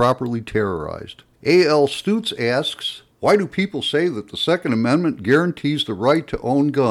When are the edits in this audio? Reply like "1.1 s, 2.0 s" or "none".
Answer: 1.3 s, 3.1 s